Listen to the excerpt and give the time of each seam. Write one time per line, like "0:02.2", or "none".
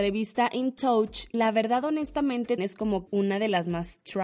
0:01.3
0:02.6
0:03.1